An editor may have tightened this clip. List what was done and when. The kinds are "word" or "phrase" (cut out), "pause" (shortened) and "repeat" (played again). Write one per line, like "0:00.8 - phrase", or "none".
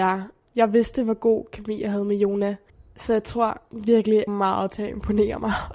0:02.7 - pause
0:04.3 - phrase